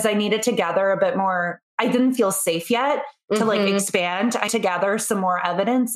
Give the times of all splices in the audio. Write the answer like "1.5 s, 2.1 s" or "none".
1.7 s, 4.5 s